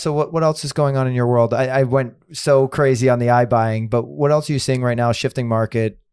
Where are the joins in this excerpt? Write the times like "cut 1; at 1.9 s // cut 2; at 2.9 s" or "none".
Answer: none